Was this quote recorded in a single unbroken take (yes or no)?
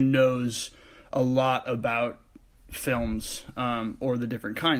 yes